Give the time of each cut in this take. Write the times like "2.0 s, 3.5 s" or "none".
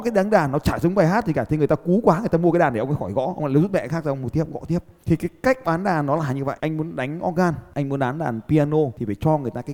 none